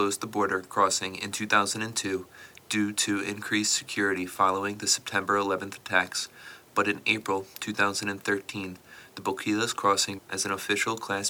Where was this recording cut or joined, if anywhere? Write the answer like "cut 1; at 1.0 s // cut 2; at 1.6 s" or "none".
cut 1; at 10.2 s